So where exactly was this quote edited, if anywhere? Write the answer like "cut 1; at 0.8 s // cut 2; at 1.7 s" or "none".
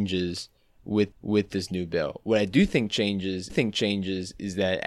cut 1; at 1.1 s // cut 2; at 3.5 s